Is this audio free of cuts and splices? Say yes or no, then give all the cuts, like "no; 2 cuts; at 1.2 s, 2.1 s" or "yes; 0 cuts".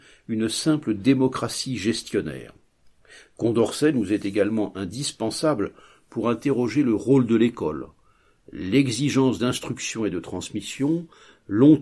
yes; 0 cuts